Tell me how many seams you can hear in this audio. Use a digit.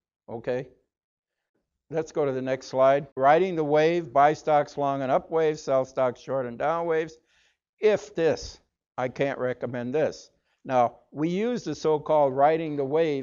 3